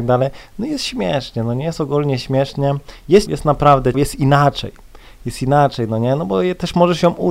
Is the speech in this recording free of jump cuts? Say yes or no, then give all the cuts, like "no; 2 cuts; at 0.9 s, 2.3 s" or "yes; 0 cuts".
no; 2 cuts; at 3.3 s, 3.9 s